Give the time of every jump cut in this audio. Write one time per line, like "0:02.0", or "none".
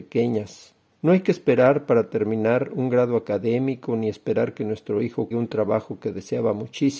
0:00.9
0:05.3